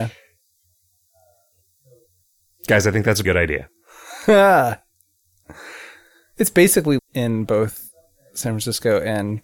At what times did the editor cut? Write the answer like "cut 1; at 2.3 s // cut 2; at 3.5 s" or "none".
cut 1; at 3.2 s // cut 2; at 7.0 s